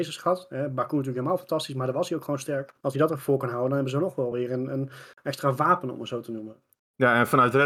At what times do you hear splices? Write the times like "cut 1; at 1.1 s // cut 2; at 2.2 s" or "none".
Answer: none